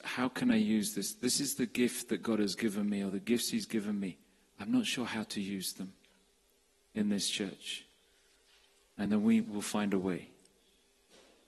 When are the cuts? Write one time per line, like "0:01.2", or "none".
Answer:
none